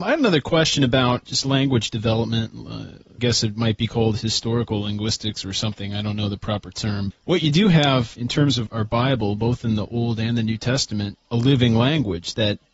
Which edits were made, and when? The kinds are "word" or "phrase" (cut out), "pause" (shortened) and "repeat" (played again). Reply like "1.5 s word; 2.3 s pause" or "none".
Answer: 1.2 s word; 3.2 s word; 7.1 s word; 8.1 s word; 8.7 s word; 11.1 s word

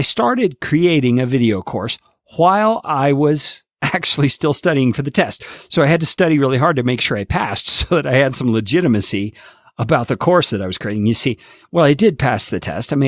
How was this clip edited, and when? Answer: 3.7 s pause

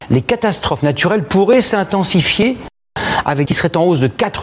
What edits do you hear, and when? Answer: 3.5 s phrase

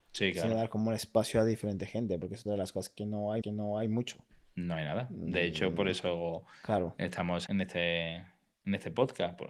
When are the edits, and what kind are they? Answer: 2.5 s phrase; 3.4 s repeat; 7.5 s word

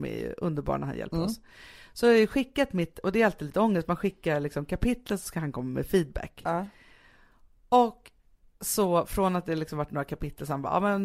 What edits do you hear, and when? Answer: none

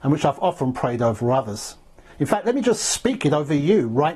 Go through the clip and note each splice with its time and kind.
none

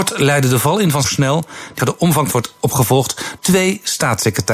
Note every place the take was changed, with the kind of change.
1.0 s phrase; 1.8 s word; 2.3 s phrase; 3.4 s word

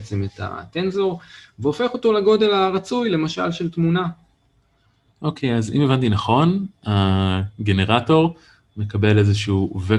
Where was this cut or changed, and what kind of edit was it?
none

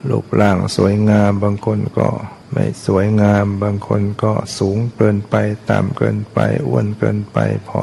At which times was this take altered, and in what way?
2.4 s pause

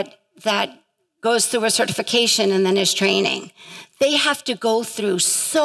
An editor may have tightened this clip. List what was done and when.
none

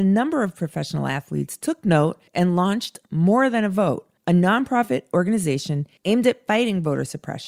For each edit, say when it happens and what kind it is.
2.3 s pause; 4.2 s pause; 6.0 s pause

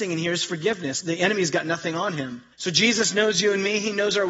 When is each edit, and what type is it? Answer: 1.0 s word; 2.5 s pause

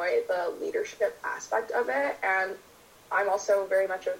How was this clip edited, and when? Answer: none

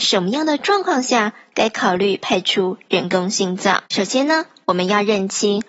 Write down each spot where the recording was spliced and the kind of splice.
3.9 s pause

